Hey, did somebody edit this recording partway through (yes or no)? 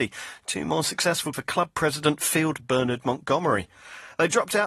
yes